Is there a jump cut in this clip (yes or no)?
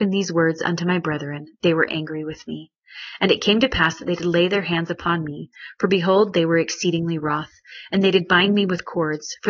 no